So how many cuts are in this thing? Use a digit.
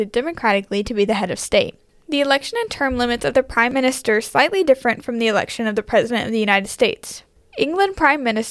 0